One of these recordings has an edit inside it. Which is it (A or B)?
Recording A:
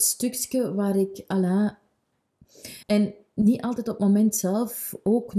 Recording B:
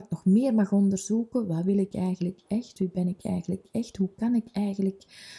A